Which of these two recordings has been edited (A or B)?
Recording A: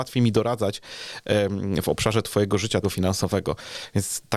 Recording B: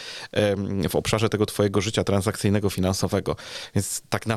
A